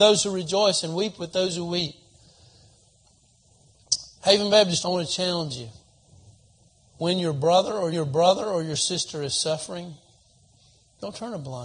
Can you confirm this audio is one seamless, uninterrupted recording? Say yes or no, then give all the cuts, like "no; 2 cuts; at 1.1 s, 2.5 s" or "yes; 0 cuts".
no; 4 cuts; at 4.2 s, 4.8 s, 6.6 s, 7.9 s